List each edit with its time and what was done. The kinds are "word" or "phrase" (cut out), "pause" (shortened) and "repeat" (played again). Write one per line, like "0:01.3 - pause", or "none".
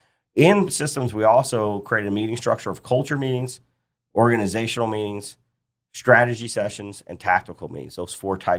none